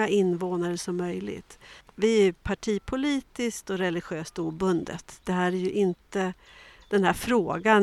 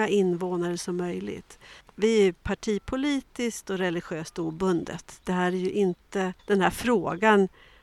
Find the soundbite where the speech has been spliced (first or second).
second